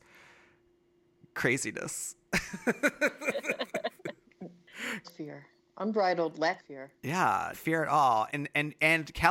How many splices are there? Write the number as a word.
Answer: four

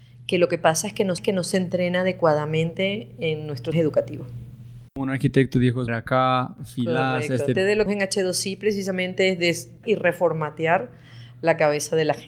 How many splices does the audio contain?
seven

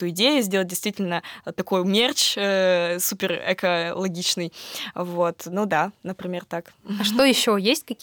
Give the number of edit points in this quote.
zero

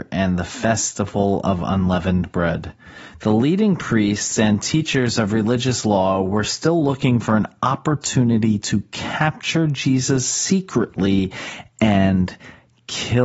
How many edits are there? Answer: zero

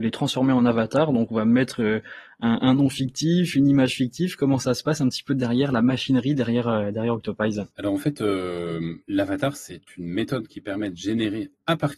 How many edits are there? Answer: two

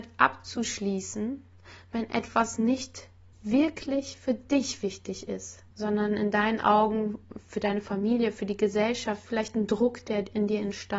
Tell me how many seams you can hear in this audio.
two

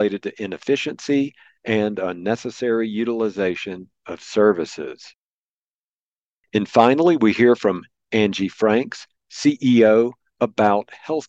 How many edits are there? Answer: zero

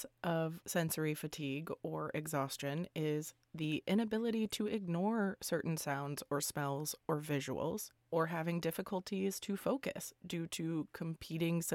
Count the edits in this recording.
one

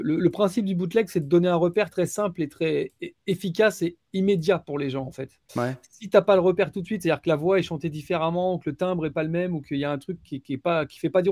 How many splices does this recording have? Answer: two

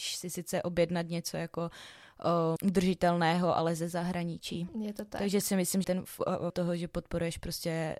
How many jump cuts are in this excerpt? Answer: three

